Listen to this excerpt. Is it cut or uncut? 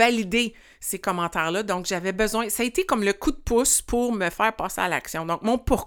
uncut